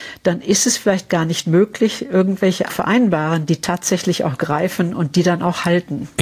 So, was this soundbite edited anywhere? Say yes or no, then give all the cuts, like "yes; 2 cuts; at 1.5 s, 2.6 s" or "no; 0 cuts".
yes; 1 cut; at 2.7 s